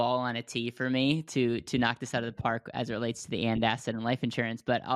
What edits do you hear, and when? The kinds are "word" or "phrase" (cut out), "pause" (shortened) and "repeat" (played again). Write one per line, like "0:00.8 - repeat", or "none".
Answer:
none